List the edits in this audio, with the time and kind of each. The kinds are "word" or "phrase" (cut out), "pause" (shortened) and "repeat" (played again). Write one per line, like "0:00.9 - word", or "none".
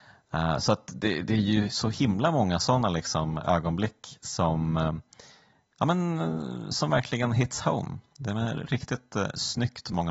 none